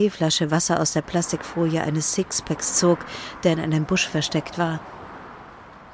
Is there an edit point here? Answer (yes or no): no